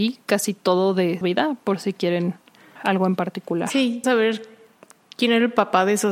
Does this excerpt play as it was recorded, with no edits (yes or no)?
no